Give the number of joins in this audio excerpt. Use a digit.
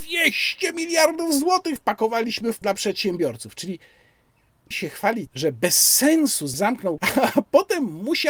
6